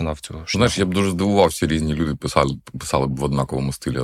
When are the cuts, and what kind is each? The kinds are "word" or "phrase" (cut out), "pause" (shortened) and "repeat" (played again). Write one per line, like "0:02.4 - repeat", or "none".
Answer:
0:01.6 - word